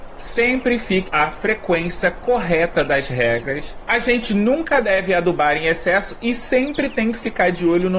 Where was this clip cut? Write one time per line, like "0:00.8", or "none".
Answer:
0:01.1